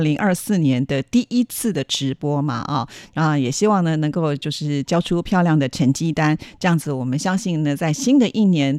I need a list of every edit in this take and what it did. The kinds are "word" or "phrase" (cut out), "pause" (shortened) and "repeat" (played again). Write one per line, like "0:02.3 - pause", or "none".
none